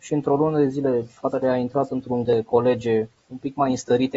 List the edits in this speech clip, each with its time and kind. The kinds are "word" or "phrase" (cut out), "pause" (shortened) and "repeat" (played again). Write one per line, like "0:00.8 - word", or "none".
0:01.4 - phrase
0:02.2 - word
0:03.2 - pause